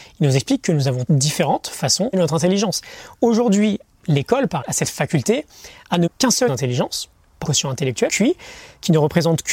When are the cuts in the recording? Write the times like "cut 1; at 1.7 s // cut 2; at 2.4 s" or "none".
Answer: cut 1; at 1.1 s // cut 2; at 2.1 s // cut 3; at 4.6 s // cut 4; at 6.1 s // cut 5; at 6.5 s // cut 6; at 7.4 s // cut 7; at 8.1 s